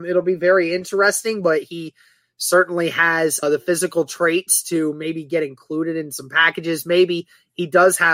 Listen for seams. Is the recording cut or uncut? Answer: cut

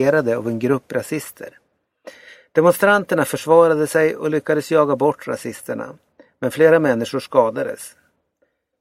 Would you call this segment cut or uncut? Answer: uncut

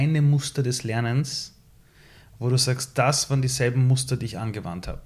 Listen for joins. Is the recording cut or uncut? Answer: uncut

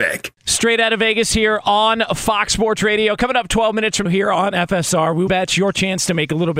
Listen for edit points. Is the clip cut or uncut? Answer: cut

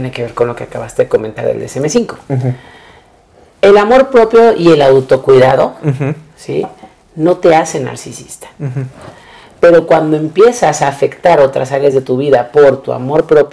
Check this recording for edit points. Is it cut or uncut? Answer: uncut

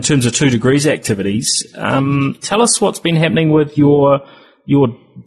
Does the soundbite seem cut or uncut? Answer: uncut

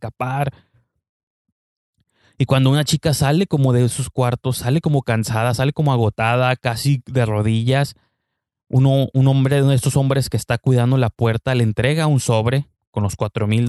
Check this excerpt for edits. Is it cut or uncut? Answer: uncut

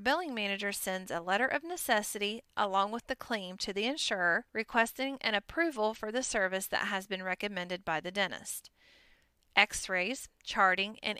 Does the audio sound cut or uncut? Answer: cut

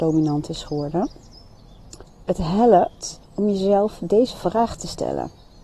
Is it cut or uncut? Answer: cut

